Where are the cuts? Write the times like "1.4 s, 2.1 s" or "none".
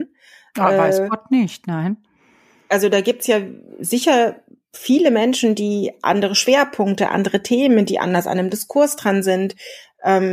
none